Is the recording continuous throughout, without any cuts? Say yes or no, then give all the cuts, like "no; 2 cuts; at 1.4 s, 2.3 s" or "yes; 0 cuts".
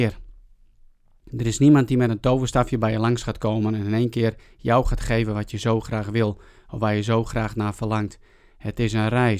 yes; 0 cuts